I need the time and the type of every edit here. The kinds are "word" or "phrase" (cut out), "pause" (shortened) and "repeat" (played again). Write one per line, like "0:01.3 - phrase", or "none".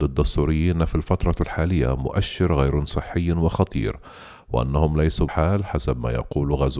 0:05.3 - word

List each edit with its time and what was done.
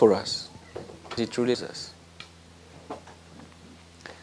0:01.2 - word
0:01.5 - word

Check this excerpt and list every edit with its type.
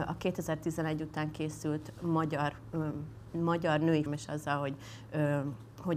0:04.1 - phrase

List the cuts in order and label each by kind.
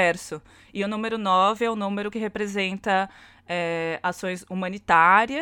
none

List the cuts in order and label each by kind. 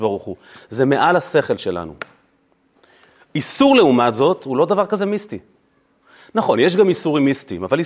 none

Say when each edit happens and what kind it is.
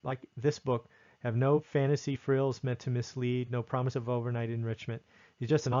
none

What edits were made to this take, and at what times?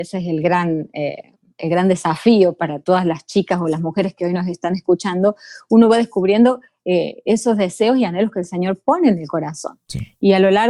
none

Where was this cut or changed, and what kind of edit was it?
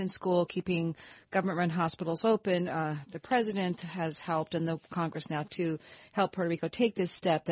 none

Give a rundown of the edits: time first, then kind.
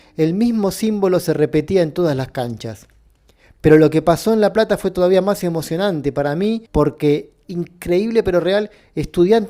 0:06.7 - pause

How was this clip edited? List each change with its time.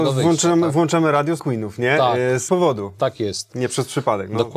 0:01.4 - word
0:02.5 - word

